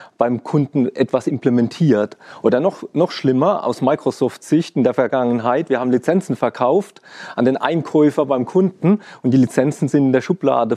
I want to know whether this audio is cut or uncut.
uncut